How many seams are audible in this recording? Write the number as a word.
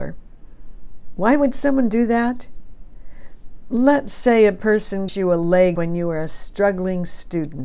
two